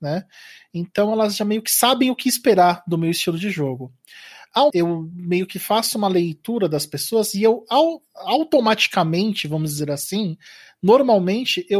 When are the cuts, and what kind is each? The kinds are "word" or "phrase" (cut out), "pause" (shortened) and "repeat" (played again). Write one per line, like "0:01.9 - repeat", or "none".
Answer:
0:04.7 - phrase